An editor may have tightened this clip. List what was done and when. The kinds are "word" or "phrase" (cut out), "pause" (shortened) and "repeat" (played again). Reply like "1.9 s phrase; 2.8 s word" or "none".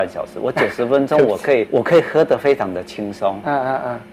1.7 s word